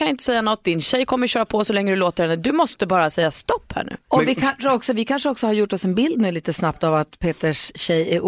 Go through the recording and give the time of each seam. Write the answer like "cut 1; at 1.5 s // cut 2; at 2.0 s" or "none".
none